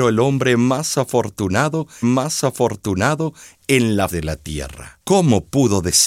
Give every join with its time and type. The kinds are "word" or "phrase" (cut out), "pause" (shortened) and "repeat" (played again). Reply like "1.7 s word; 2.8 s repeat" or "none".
2.0 s repeat; 4.1 s word; 5.0 s pause